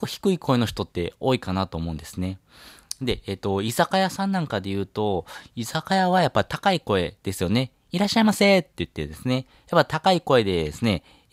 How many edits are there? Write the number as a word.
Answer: zero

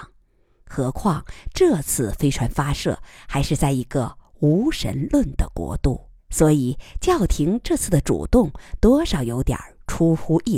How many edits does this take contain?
one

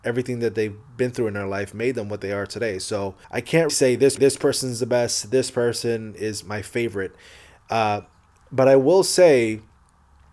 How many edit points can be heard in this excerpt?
four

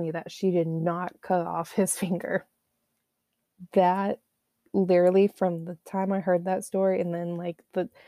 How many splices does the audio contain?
zero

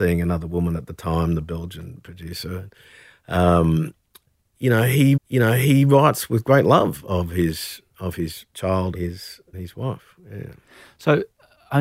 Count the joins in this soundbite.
three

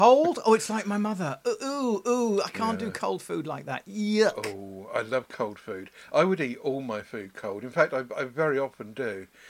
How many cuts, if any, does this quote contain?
zero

